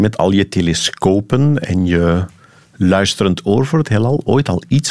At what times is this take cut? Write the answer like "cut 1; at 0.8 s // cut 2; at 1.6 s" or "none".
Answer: none